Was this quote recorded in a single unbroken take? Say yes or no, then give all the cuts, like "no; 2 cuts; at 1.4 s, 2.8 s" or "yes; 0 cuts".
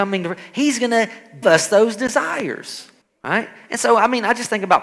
no; 2 cuts; at 1.4 s, 3.0 s